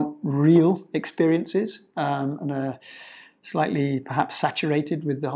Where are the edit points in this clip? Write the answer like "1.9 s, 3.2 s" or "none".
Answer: none